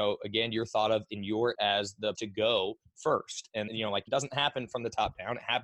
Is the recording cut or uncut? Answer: cut